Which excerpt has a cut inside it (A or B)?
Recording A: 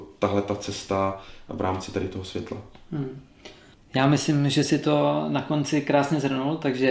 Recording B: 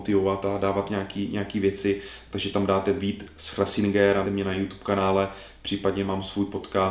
B